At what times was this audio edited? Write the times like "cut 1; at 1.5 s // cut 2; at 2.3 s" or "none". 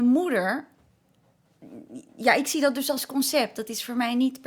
none